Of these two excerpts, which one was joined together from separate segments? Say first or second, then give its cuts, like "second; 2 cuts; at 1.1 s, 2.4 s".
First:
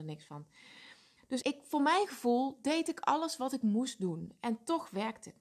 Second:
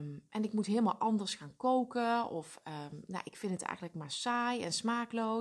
first; 1 cut; at 1.4 s